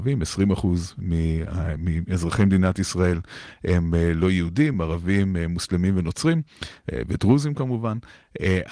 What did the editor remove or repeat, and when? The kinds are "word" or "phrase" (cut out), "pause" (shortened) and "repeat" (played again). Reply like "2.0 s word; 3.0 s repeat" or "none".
none